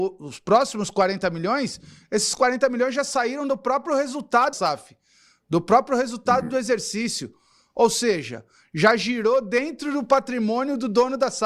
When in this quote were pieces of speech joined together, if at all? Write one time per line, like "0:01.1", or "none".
0:04.5